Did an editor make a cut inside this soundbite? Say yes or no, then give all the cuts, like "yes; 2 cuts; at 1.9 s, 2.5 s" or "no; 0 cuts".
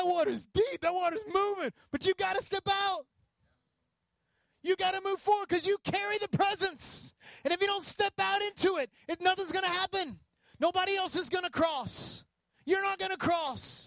no; 0 cuts